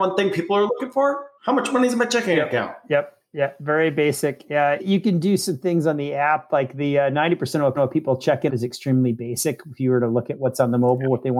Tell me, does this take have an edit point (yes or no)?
yes